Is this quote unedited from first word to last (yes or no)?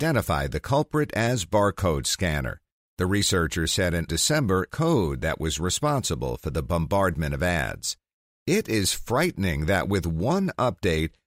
no